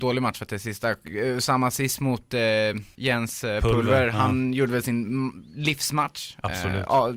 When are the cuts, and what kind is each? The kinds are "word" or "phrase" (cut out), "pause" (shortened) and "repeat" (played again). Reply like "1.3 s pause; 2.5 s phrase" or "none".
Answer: none